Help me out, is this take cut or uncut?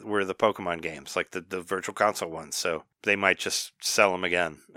uncut